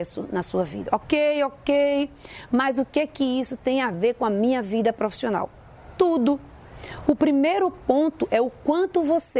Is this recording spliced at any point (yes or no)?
no